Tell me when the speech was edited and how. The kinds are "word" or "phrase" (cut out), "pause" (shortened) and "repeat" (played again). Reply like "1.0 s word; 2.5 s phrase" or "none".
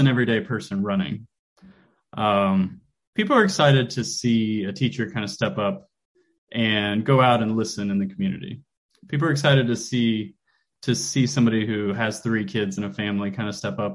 none